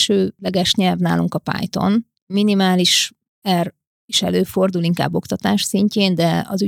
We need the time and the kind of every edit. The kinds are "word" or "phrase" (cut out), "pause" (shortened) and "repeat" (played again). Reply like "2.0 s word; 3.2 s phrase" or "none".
none